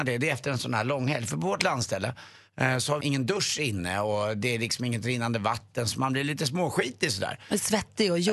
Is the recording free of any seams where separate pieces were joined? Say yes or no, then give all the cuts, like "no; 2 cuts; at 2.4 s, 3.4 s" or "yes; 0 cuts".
no; 1 cut; at 3.0 s